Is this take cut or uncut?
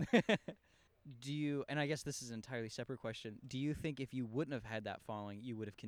uncut